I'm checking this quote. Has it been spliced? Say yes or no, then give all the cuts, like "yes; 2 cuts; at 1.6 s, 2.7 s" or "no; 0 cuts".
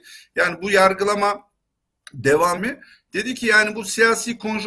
yes; 1 cut; at 2.6 s